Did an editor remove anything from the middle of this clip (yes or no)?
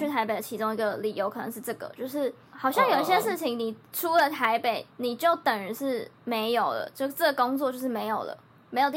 yes